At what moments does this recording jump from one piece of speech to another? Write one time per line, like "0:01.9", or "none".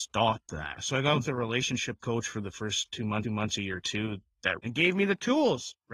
0:03.2
0:04.6

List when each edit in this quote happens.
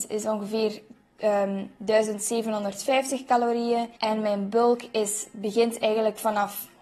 0:04.0

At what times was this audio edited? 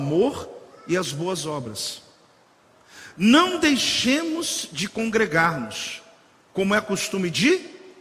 none

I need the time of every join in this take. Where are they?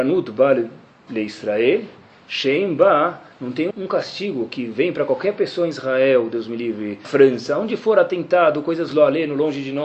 0:03.7
0:07.0
0:08.9

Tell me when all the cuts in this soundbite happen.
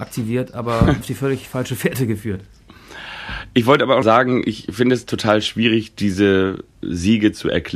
0:01.0
0:04.0

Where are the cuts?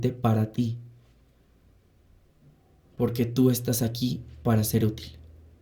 none

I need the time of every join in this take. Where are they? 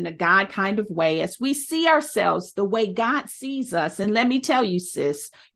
none

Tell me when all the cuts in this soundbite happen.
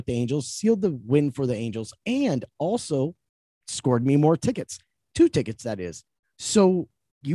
none

